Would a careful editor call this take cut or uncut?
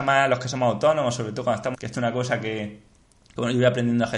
cut